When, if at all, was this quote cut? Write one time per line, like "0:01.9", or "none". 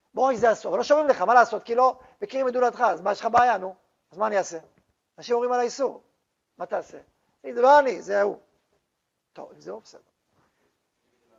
none